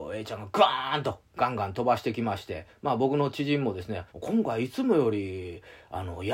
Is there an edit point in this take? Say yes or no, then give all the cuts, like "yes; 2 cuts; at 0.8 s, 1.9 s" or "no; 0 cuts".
yes; 1 cut; at 4.1 s